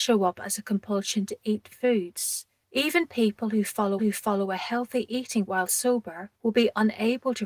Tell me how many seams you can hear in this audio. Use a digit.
4